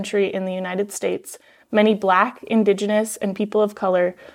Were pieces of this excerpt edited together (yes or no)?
no